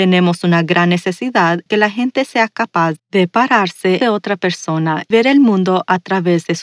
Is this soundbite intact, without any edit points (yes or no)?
no